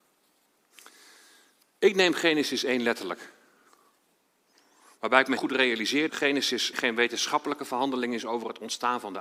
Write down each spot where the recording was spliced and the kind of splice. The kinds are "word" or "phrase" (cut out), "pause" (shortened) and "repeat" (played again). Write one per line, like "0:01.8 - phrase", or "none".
0:05.4 - word
0:06.1 - word
0:06.7 - word